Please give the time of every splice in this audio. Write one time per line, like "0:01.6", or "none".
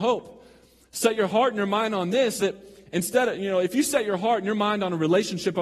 0:02.4